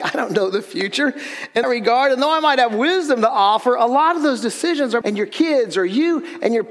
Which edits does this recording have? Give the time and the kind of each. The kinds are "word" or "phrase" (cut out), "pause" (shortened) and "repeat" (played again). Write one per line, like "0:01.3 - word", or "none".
0:01.6 - word
0:05.0 - phrase